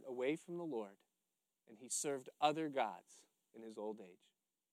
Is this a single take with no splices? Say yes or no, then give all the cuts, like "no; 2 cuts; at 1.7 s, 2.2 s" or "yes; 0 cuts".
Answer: yes; 0 cuts